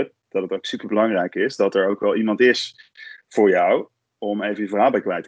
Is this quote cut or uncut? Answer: uncut